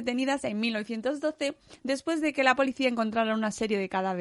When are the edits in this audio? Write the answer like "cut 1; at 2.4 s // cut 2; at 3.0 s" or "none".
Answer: none